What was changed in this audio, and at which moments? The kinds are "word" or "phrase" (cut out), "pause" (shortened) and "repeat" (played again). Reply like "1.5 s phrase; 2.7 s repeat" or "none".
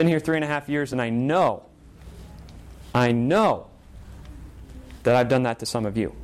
none

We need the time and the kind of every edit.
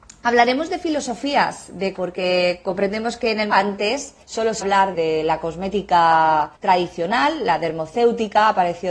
1.9 s word; 3.5 s word; 4.2 s pause; 4.6 s word; 4.9 s word; 6.5 s pause

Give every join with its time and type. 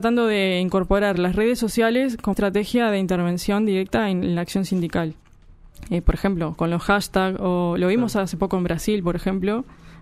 2.3 s word

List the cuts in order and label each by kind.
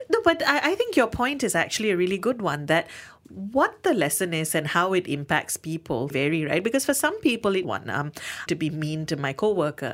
6.1 s phrase; 7.6 s phrase; 8.5 s phrase

